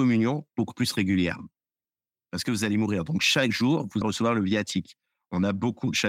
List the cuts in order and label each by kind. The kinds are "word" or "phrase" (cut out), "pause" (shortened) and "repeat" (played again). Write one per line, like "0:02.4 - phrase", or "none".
0:04.0 - word